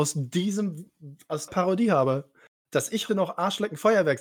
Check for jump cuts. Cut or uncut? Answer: cut